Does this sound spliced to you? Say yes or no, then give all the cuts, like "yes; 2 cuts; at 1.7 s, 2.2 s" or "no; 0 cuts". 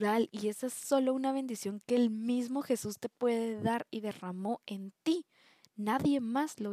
no; 0 cuts